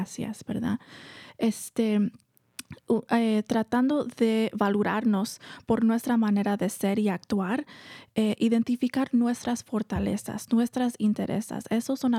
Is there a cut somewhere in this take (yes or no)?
no